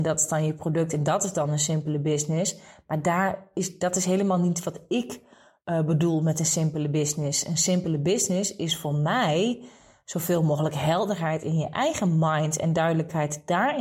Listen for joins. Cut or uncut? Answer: uncut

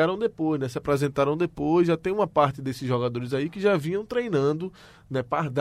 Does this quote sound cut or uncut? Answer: uncut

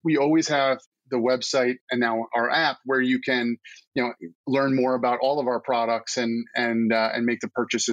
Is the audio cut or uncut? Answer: uncut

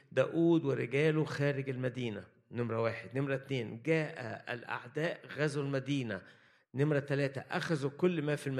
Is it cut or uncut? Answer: uncut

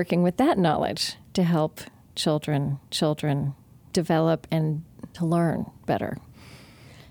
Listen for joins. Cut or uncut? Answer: cut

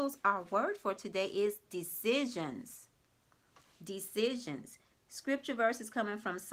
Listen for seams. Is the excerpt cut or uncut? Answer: uncut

